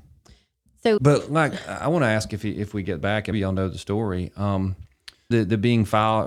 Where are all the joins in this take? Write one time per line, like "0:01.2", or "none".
0:01.0
0:03.3
0:05.3

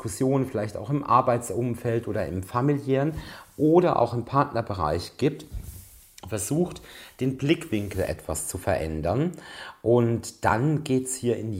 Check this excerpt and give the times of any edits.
none

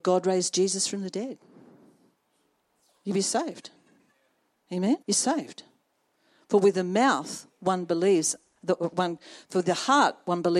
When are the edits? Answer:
0:05.0

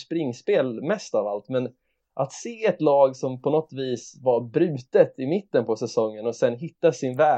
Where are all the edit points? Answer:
none

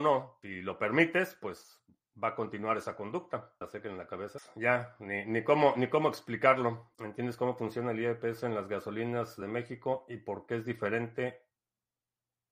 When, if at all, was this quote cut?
none

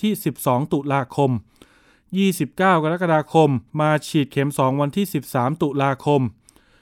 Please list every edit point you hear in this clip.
0:03.7

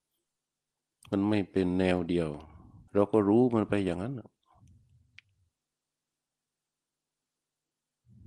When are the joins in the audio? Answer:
0:02.9

